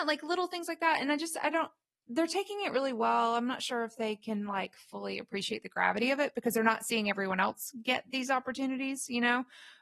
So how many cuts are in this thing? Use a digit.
0